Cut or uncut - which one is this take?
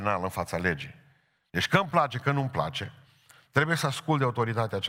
uncut